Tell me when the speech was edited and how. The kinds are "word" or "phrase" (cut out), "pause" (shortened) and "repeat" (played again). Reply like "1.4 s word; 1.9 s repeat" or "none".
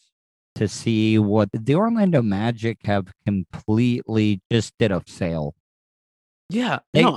1.5 s word; 4.4 s word; 5.1 s word